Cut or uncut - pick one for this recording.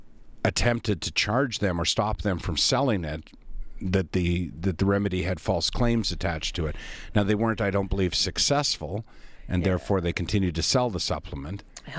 uncut